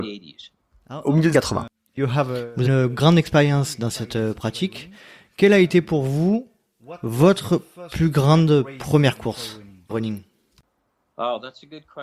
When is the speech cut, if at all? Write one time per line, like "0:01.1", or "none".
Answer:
0:01.3
0:02.6
0:09.9